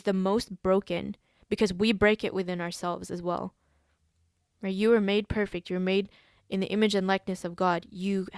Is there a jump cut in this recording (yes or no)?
no